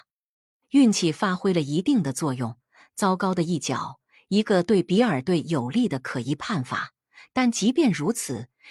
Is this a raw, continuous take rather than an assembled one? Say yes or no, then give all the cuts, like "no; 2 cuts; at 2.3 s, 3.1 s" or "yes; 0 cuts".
yes; 0 cuts